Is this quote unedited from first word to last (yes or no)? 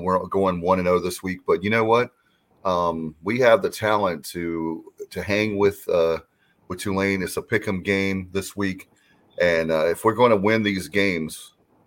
yes